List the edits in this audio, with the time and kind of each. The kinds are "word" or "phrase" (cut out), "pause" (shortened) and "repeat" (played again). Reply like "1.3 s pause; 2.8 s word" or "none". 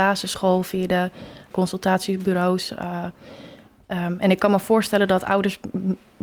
1.5 s word